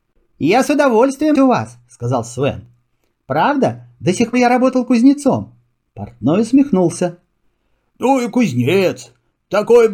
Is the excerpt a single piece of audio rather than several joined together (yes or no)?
no